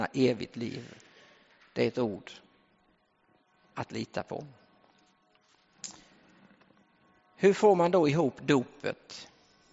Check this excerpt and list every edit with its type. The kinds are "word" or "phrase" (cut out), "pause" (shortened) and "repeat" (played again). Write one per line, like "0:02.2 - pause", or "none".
none